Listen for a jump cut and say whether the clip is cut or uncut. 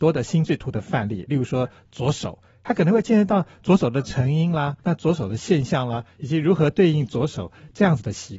cut